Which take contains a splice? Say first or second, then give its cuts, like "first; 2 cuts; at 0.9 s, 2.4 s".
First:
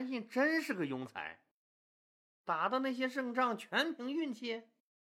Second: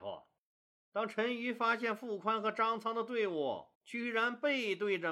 second; 1 cut; at 3.7 s